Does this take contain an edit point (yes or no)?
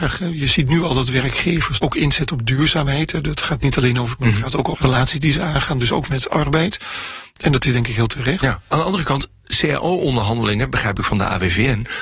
yes